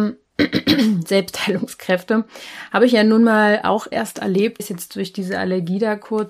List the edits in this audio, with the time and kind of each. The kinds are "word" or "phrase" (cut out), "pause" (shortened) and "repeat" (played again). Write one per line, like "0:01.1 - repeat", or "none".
0:03.9 - word
0:04.6 - word